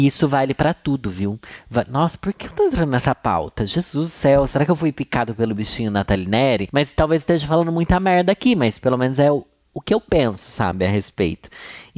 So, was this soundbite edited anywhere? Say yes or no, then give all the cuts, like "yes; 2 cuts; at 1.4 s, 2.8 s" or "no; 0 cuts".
no; 0 cuts